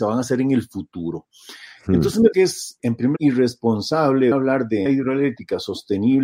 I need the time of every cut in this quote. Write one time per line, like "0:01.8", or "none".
0:02.3
0:02.8
0:03.2
0:04.3
0:04.9